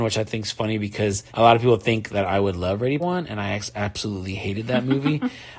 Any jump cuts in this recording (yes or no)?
yes